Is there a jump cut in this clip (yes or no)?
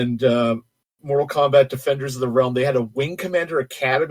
no